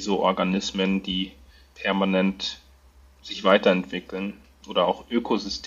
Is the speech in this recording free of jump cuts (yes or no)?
yes